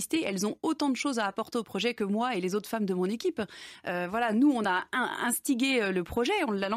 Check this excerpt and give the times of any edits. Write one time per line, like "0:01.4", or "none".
none